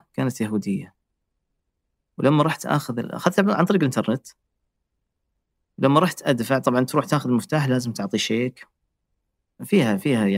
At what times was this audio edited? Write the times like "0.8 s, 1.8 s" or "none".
none